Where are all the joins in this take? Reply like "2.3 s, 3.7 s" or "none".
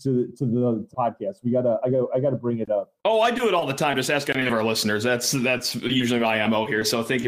0.9 s, 3.0 s